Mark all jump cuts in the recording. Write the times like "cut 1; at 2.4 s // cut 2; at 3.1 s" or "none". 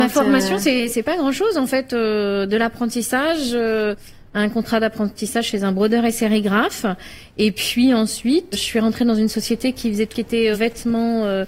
cut 1; at 8.5 s // cut 2; at 10.1 s // cut 3; at 10.5 s

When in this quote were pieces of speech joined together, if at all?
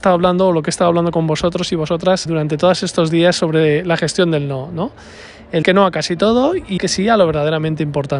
cut 1; at 2.3 s // cut 2; at 5.6 s // cut 3; at 6.8 s

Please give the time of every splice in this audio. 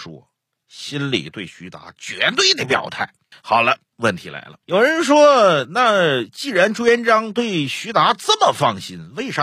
cut 1; at 3.3 s // cut 2; at 4.6 s

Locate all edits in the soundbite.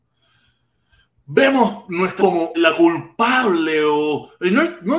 cut 1; at 2.2 s // cut 2; at 2.5 s

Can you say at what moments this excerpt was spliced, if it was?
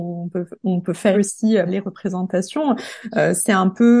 cut 1; at 1.1 s // cut 2; at 1.7 s

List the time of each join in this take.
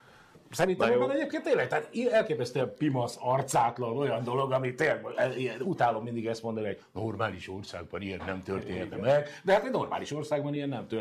none

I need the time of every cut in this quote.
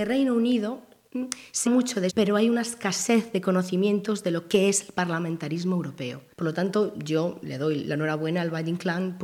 cut 1; at 1.7 s // cut 2; at 2.1 s // cut 3; at 6.3 s

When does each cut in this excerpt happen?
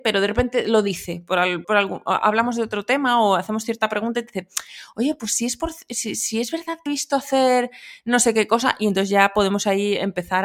cut 1; at 1.6 s // cut 2; at 6.9 s

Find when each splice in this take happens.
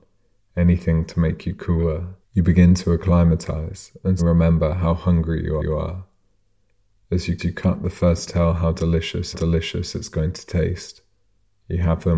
cut 1; at 2.2 s // cut 2; at 4.2 s // cut 3; at 5.6 s // cut 4; at 7.4 s // cut 5; at 8.3 s // cut 6; at 9.3 s

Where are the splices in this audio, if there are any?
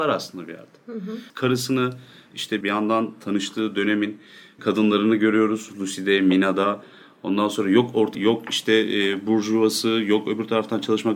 cut 1; at 1.3 s // cut 2; at 2.6 s // cut 3; at 8.1 s

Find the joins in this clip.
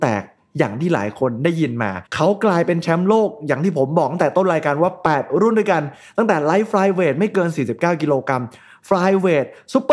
cut 1; at 2.1 s

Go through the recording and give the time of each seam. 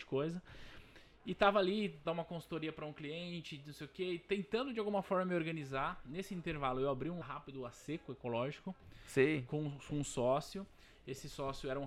cut 1; at 2.0 s // cut 2; at 7.2 s

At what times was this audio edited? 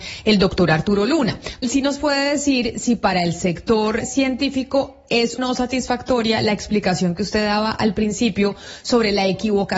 cut 1; at 1.6 s // cut 2; at 4.0 s // cut 3; at 5.4 s

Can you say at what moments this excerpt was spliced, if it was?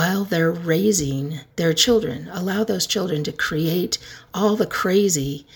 cut 1; at 1.5 s

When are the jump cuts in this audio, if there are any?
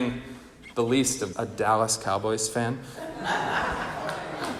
cut 1; at 1.3 s

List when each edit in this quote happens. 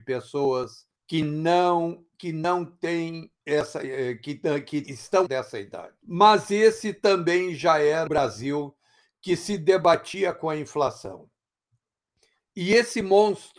cut 1; at 1.0 s // cut 2; at 3.4 s // cut 3; at 4.8 s // cut 4; at 5.3 s // cut 5; at 6.0 s // cut 6; at 8.1 s

